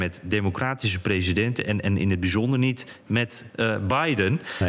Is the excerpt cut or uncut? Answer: uncut